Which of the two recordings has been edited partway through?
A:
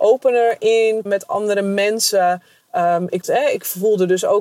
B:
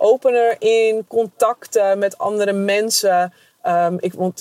A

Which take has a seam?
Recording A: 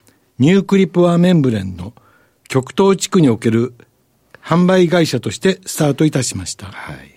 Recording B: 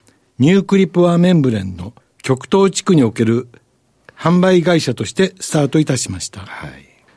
B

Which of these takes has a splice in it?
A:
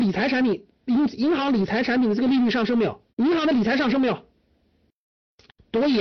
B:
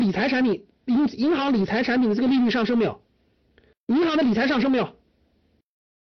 A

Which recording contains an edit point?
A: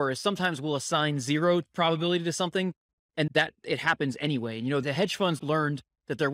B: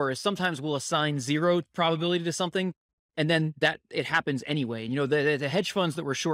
A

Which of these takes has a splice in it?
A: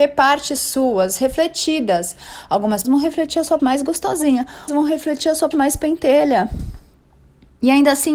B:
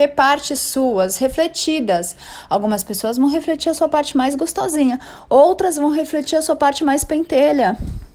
A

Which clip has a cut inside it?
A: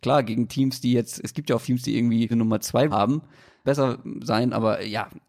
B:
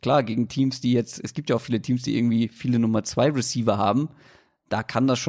A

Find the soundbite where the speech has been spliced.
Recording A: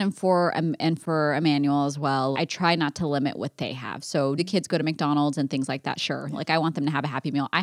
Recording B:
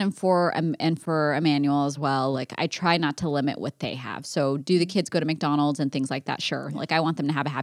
A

